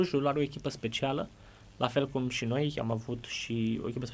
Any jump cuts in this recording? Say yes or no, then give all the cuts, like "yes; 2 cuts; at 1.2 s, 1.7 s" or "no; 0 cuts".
no; 0 cuts